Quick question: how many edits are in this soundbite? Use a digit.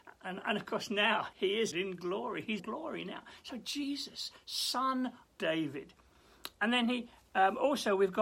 4